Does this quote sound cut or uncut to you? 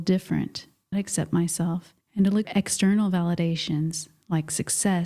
cut